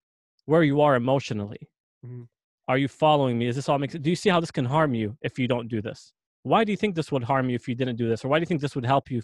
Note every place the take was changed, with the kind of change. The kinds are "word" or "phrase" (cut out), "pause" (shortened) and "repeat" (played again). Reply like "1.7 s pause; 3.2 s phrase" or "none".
none